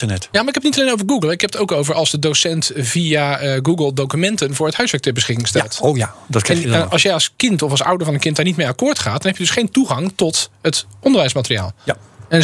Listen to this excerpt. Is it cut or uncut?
uncut